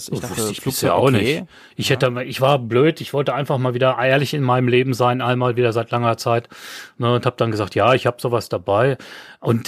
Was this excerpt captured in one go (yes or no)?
yes